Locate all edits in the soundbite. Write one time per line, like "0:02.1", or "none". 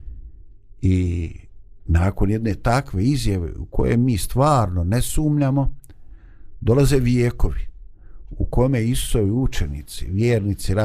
none